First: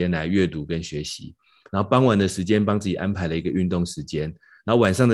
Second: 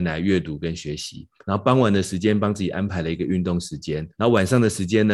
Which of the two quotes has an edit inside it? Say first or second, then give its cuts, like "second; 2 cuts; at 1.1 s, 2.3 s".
second; 2 cuts; at 1.3 s, 4.1 s